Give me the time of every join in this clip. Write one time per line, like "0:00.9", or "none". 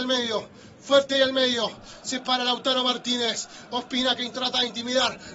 none